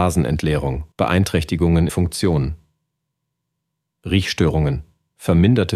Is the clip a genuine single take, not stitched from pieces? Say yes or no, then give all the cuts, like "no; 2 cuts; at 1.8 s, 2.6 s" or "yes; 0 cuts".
no; 2 cuts; at 0.9 s, 1.9 s